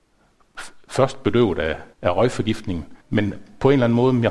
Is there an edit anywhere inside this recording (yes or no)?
yes